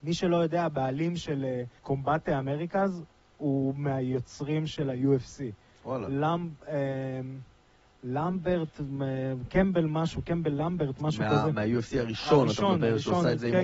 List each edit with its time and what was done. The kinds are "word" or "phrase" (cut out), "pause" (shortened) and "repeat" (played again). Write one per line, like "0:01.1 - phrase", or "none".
0:01.8 - pause